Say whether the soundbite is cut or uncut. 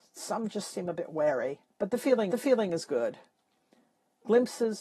cut